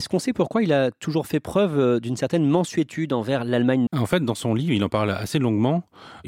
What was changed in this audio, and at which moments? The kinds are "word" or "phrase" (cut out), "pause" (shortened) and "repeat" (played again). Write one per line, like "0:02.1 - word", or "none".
0:03.9 - word